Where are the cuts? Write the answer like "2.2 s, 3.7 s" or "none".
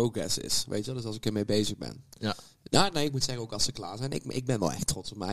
none